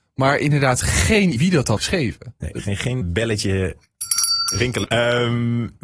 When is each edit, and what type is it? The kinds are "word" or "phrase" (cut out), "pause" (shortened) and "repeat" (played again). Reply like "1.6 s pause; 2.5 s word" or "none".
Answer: 1.4 s word; 1.8 s word; 3.0 s word; 4.8 s word